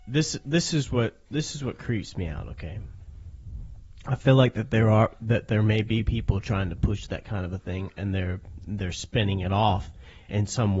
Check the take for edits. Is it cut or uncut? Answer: uncut